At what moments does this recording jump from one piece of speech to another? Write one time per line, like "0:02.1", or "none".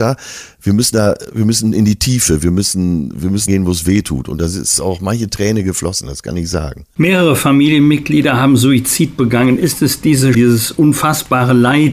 0:03.5
0:10.3